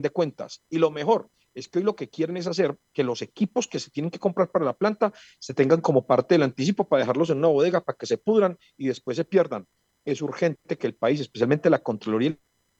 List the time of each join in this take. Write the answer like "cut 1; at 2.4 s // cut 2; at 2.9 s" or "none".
none